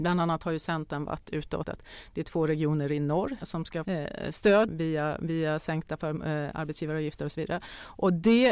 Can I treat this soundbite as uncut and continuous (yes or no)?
no